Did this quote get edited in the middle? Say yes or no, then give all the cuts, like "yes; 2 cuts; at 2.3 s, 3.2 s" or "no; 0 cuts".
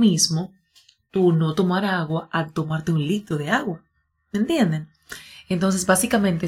no; 0 cuts